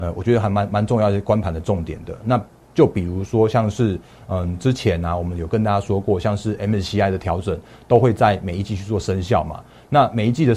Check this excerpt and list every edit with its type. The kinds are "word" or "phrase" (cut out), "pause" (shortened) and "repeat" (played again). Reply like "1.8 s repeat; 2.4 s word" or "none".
none